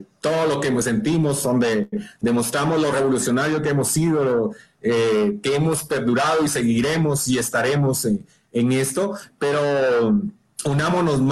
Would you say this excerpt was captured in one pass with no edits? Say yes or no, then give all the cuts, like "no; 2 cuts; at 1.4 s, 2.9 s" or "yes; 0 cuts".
yes; 0 cuts